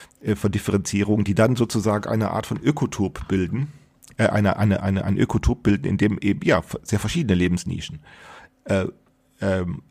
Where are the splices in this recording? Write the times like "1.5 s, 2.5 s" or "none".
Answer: none